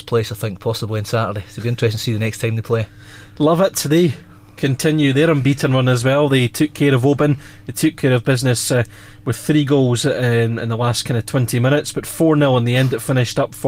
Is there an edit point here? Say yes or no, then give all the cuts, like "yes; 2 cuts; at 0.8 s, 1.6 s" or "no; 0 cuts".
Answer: no; 0 cuts